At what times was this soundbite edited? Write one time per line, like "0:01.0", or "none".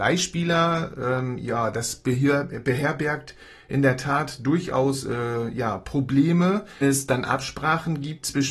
0:06.8